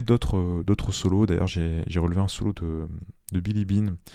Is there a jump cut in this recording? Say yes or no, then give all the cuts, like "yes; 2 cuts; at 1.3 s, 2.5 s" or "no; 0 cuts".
no; 0 cuts